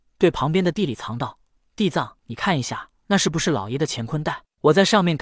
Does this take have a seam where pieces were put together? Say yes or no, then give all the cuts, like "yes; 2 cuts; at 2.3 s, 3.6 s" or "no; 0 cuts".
yes; 2 cuts; at 2.2 s, 3.0 s